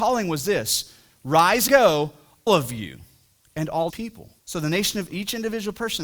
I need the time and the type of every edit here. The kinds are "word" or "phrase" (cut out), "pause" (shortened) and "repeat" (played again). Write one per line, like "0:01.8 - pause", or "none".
0:01.7 - word
0:02.5 - word
0:03.9 - word
0:04.4 - pause
0:05.1 - word